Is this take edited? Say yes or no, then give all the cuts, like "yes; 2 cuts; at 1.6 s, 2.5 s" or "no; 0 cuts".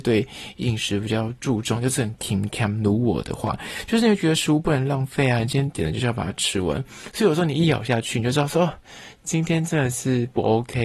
no; 0 cuts